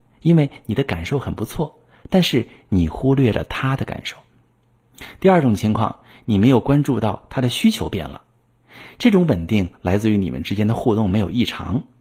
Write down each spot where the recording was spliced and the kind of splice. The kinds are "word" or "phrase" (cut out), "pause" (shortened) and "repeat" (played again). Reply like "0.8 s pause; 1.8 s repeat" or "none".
none